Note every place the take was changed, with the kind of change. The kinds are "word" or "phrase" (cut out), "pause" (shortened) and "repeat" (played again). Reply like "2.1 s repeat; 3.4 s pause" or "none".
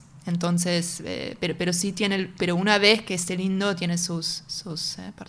none